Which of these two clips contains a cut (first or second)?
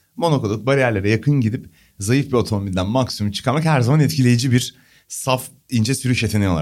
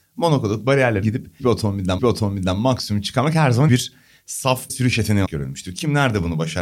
second